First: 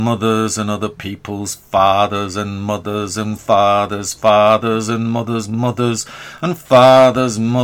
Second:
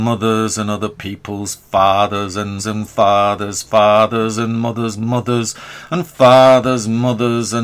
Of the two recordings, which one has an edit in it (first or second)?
second